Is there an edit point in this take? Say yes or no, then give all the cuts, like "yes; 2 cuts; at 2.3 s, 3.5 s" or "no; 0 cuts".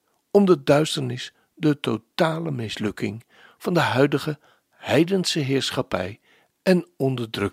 no; 0 cuts